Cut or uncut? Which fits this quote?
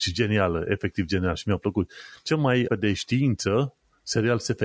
cut